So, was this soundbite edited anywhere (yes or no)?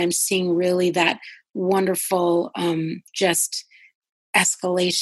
yes